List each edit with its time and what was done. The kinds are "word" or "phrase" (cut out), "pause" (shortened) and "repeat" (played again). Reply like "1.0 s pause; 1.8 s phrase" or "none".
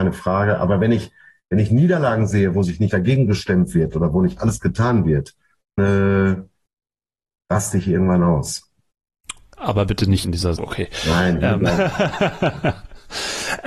2.9 s word; 5.8 s word; 10.2 s word; 10.6 s word